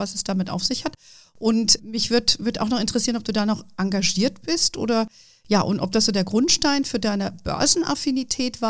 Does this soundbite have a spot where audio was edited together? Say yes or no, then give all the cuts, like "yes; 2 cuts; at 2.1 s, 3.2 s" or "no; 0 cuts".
yes; 1 cut; at 1.8 s